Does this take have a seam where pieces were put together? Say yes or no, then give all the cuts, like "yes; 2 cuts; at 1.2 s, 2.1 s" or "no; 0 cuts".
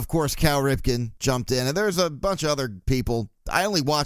no; 0 cuts